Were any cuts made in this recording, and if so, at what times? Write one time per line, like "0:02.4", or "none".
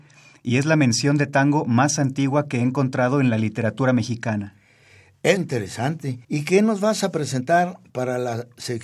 0:05.4
0:06.2